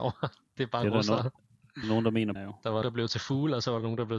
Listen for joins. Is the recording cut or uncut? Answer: cut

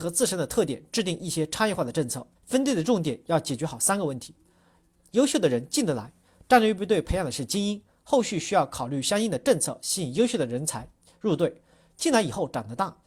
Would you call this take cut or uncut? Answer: cut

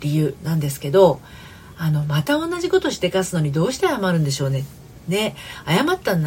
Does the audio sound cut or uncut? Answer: uncut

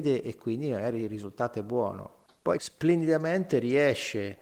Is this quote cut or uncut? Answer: cut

